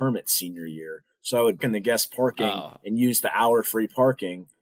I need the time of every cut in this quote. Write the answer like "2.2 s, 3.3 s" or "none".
1.6 s

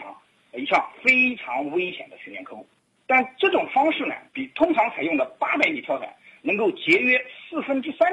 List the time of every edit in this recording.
2.8 s, 4.3 s

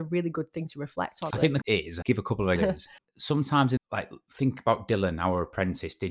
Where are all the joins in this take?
1.3 s, 1.6 s, 2.0 s, 2.6 s, 3.0 s, 3.8 s

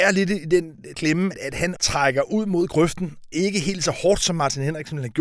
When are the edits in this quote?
0.9 s, 1.3 s, 1.8 s, 3.3 s

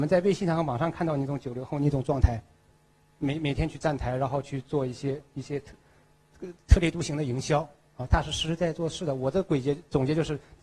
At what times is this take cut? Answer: none

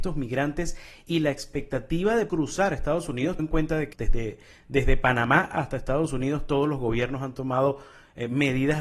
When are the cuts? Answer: 2.3 s, 3.4 s, 3.9 s

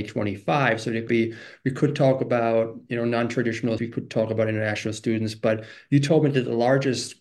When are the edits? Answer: 1.1 s, 3.8 s

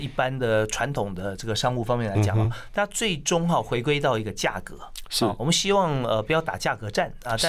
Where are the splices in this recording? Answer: none

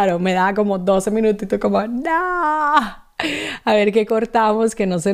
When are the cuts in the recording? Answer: none

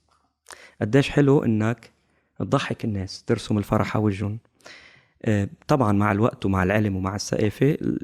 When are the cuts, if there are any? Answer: none

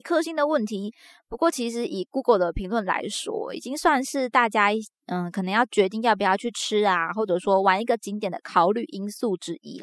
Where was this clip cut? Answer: none

